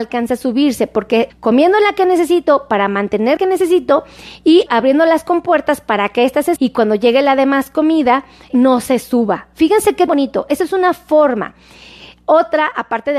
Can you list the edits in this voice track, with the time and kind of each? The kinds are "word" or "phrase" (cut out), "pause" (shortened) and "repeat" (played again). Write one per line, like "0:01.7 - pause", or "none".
0:01.3 - word
0:03.4 - word
0:04.7 - word
0:06.6 - word
0:08.5 - word
0:10.1 - word